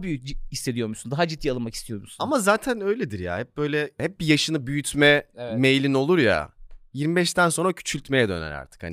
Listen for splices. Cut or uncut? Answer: uncut